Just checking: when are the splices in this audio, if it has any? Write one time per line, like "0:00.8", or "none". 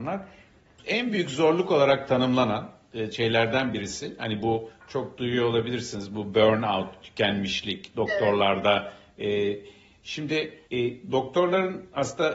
0:10.7